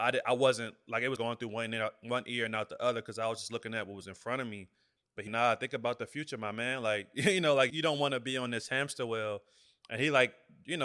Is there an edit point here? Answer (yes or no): yes